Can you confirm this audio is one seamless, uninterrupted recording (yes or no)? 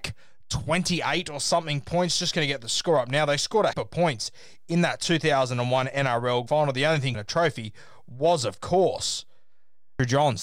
no